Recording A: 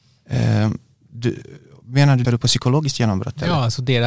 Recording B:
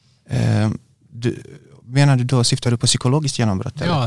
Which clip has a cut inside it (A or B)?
A